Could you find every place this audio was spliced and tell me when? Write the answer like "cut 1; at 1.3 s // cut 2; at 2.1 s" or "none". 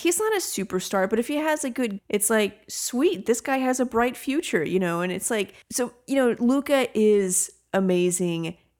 cut 1; at 2.0 s // cut 2; at 5.6 s